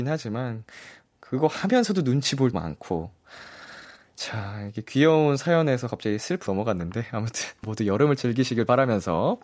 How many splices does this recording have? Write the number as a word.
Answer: three